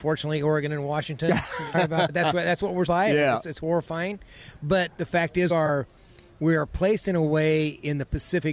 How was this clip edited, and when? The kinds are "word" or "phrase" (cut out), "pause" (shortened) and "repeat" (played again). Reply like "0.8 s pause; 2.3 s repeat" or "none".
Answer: 1.7 s word; 2.1 s word; 2.9 s word; 5.5 s word